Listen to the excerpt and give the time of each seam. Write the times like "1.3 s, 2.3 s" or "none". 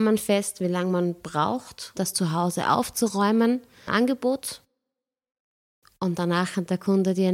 2.0 s, 3.9 s